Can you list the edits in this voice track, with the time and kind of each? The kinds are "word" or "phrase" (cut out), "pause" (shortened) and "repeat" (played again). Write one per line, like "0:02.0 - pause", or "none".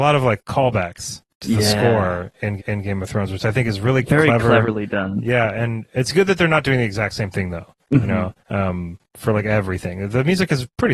0:02.6 - repeat
0:07.8 - pause
0:08.4 - pause